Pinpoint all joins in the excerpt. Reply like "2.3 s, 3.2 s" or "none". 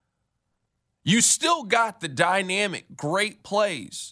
none